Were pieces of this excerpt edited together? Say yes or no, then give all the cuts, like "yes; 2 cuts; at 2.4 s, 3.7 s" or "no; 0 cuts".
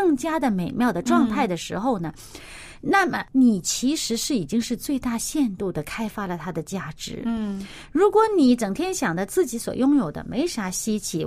yes; 1 cut; at 3.3 s